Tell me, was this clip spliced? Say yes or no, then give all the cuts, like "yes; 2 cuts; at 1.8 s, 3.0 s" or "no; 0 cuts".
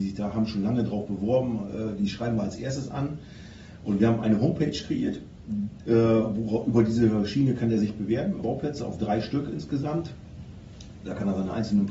yes; 1 cut; at 8.4 s